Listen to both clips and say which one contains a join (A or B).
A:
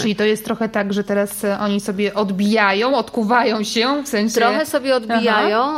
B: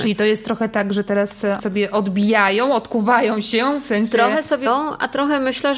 B